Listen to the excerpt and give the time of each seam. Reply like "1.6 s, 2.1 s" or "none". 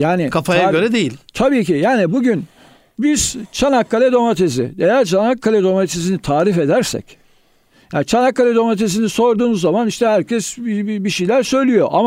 none

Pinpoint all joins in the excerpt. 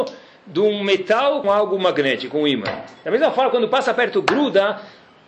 1.4 s

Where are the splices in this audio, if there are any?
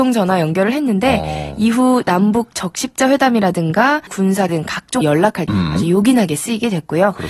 4.1 s, 4.5 s, 5.0 s, 5.5 s

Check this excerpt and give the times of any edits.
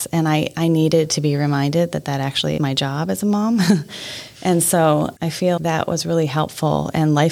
2.6 s, 5.2 s, 5.6 s

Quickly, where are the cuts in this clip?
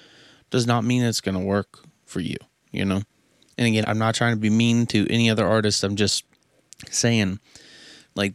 3.8 s

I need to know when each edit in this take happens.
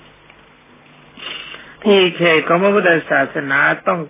1.8 s

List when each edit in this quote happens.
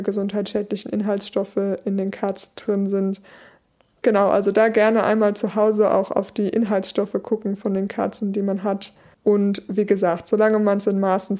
9.1 s

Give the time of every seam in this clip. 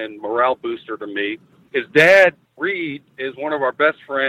1.6 s

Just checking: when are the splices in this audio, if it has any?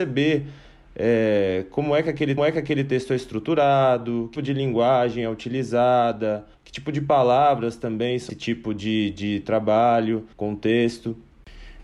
2.4 s, 4.4 s, 6.5 s, 8.3 s, 10.3 s

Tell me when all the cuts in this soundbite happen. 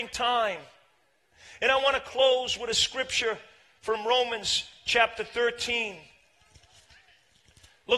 none

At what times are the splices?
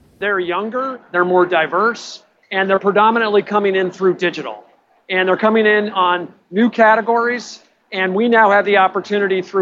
none

